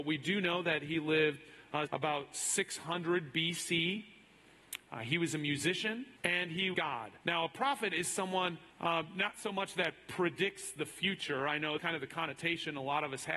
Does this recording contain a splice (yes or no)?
yes